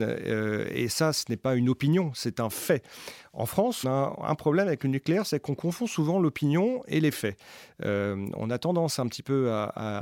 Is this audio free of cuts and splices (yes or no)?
no